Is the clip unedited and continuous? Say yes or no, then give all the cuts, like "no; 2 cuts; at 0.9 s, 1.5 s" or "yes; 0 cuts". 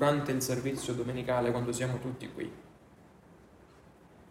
yes; 0 cuts